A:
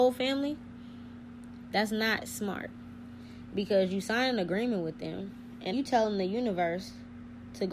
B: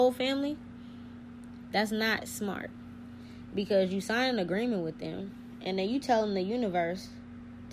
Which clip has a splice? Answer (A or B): A